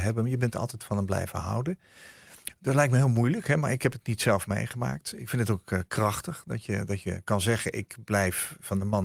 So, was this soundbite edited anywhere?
no; 0 cuts

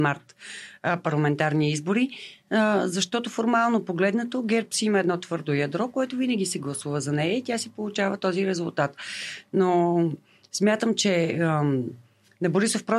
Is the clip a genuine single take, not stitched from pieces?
yes; 0 cuts

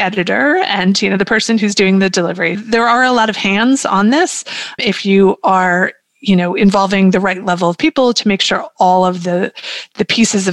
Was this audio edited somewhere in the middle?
yes; 2 cuts; at 2.5 s, 4.8 s

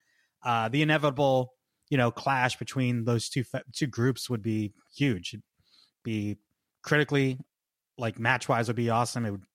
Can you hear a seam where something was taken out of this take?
no; 0 cuts

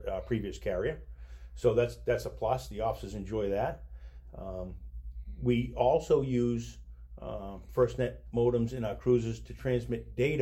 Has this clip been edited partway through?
no; 0 cuts

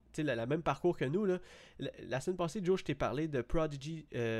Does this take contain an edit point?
no; 0 cuts

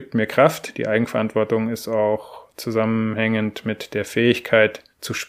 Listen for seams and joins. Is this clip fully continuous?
yes; 0 cuts

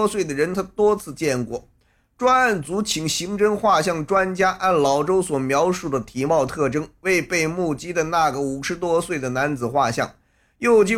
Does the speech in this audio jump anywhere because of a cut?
no; 0 cuts

